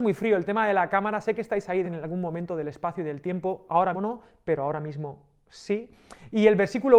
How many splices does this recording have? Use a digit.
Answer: 2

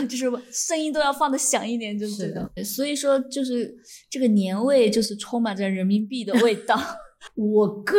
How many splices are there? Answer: 1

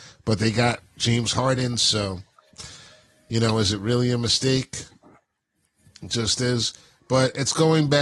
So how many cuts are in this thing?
0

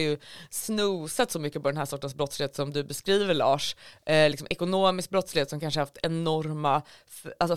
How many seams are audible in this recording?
0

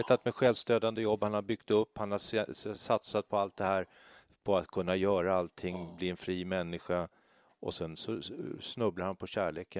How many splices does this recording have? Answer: 0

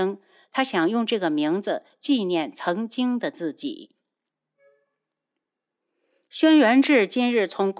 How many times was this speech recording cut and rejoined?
0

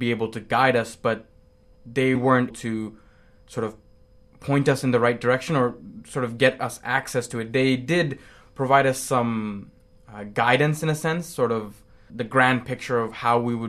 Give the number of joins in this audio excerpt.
3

